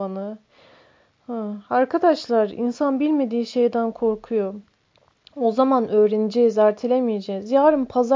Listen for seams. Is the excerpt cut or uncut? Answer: uncut